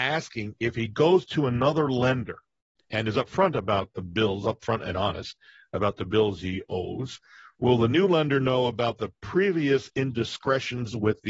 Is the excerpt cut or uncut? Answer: uncut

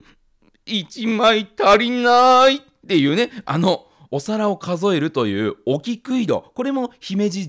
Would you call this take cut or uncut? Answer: uncut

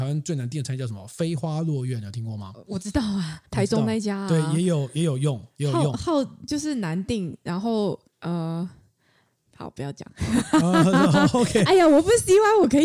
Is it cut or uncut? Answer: cut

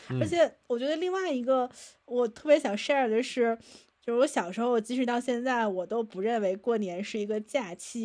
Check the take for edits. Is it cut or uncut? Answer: uncut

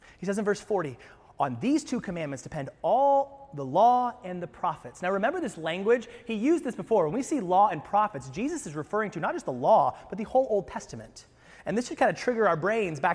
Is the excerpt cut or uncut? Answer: uncut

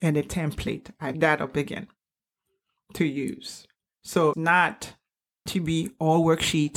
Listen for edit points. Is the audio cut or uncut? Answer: cut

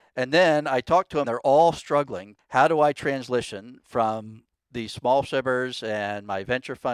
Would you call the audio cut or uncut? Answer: cut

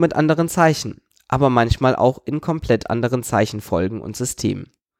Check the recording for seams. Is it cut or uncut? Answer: uncut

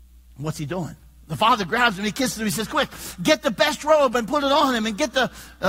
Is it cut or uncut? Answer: uncut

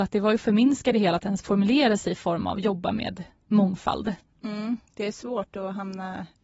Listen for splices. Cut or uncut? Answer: uncut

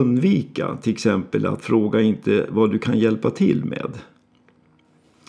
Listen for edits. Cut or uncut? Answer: uncut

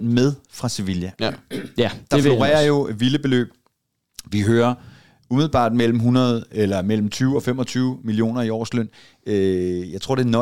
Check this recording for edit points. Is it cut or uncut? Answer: uncut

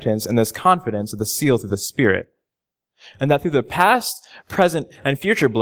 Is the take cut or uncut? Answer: uncut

